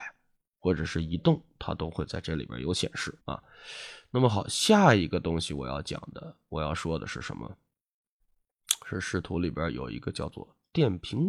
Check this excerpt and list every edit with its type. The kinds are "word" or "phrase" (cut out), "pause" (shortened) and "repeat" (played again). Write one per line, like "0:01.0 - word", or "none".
0:03.2 - pause